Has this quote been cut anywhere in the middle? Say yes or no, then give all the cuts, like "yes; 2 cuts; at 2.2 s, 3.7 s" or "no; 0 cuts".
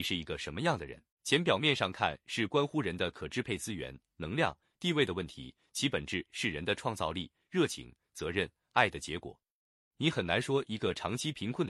yes; 1 cut; at 1.1 s